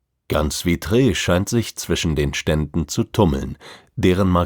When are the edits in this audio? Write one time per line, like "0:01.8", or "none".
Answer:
none